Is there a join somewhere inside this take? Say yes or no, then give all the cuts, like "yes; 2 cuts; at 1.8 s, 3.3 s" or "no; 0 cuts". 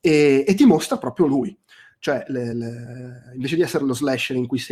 no; 0 cuts